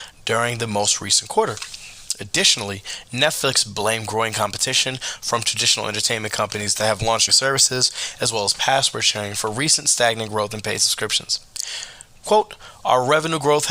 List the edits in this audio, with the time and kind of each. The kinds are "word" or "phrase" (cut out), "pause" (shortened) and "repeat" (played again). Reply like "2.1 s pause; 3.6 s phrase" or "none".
7.3 s word